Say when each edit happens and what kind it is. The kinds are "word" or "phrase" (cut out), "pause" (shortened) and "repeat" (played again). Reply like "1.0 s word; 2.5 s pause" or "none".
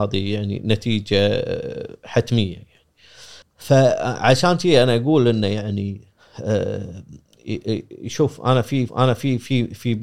3.4 s pause; 8.9 s repeat